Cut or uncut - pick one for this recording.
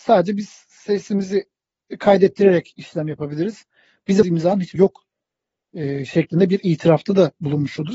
cut